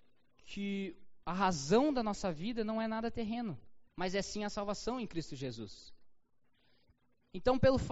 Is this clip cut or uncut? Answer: cut